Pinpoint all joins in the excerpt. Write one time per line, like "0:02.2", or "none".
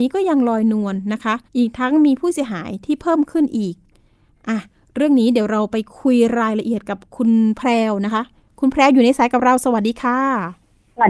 0:01.5

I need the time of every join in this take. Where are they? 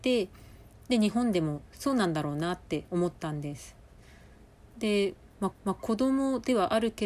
0:02.9
0:05.5

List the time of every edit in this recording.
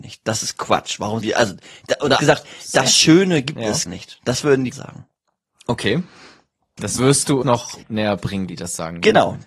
0:01.2
0:02.2
0:03.9
0:04.7
0:07.0
0:07.4
0:07.8
0:08.5

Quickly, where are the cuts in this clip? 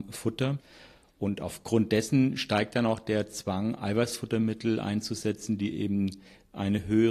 none

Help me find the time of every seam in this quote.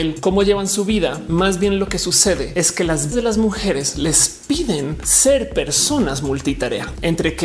0:03.1

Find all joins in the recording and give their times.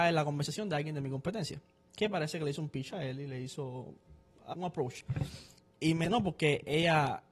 0:04.5
0:06.0

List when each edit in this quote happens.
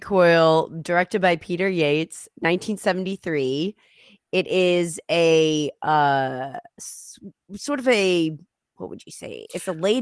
none

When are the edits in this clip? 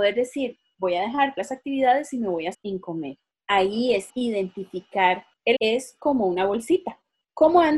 0:01.4
0:02.5
0:04.1
0:05.6

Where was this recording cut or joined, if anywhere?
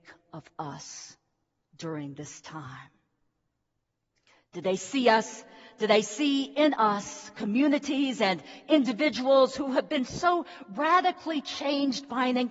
none

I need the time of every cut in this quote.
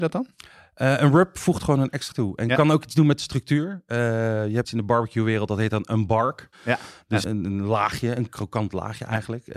0:02.1
0:04.6
0:06.5
0:07.2

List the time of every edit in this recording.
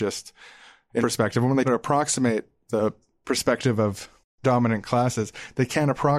0:01.0
0:01.6
0:04.4

